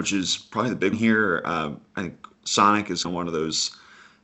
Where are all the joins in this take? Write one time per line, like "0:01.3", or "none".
0:00.9
0:02.3
0:03.0